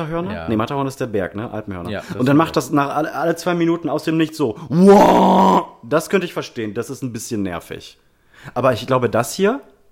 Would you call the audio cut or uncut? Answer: uncut